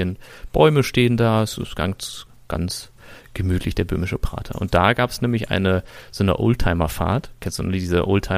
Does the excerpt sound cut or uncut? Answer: cut